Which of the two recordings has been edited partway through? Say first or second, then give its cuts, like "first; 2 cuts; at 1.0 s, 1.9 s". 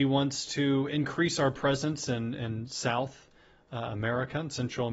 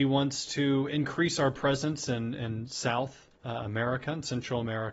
second; 1 cut; at 3.4 s